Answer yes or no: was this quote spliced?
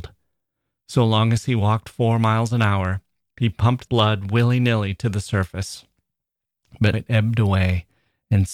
yes